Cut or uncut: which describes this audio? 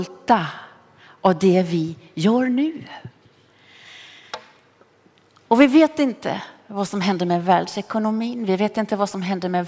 uncut